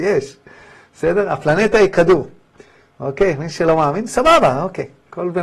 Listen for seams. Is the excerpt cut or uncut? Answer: uncut